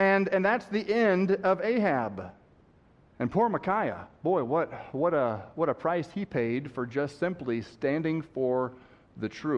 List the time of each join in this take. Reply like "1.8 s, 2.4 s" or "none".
2.6 s

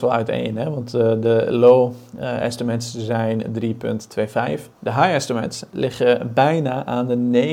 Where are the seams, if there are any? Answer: 4.7 s

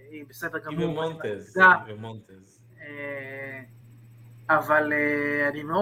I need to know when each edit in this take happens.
none

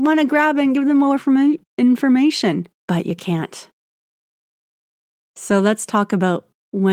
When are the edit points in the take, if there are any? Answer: 2.8 s

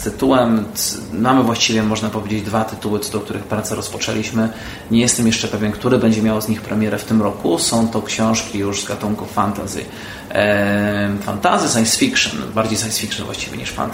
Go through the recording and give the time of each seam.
none

